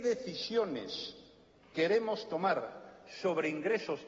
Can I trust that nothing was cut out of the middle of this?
yes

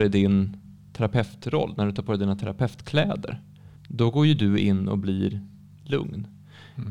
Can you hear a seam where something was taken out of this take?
yes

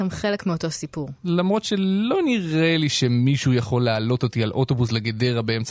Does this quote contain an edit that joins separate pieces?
yes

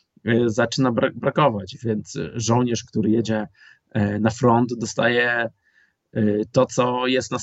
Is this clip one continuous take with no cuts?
yes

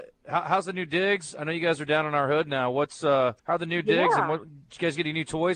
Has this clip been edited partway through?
yes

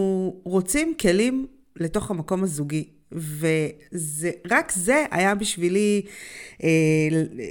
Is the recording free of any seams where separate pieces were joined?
yes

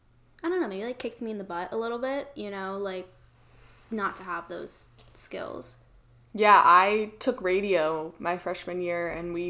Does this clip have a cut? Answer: no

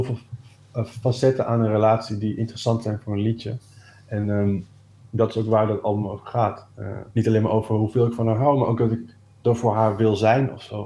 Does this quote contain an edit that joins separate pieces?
yes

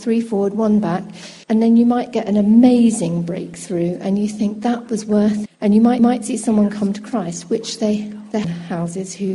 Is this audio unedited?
no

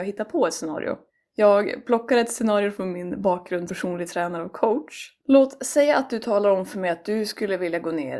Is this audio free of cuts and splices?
no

